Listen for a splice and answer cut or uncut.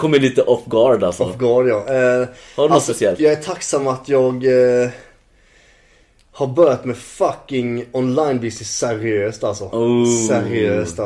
uncut